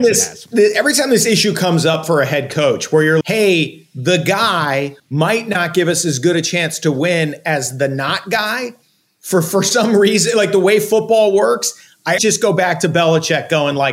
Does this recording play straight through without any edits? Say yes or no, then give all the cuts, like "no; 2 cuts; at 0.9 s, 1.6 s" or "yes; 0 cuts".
no; 3 cuts; at 3.2 s, 5.0 s, 12.2 s